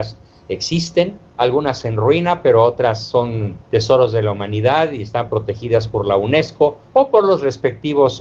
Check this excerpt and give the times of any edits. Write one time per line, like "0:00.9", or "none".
0:01.3
0:03.6
0:06.9